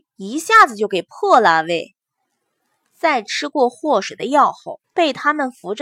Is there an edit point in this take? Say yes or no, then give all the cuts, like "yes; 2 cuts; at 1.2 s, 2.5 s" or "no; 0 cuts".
yes; 1 cut; at 4.8 s